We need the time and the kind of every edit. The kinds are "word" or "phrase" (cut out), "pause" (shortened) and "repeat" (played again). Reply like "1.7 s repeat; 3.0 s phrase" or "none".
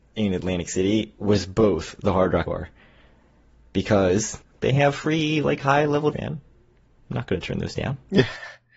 2.5 s word; 4.4 s pause; 6.1 s word